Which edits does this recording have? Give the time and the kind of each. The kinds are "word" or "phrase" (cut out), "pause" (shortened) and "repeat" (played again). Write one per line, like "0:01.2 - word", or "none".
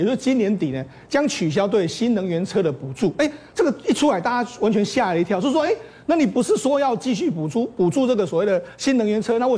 none